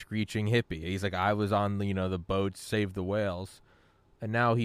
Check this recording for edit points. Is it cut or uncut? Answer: uncut